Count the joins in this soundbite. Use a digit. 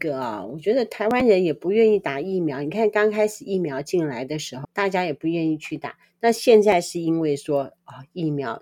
1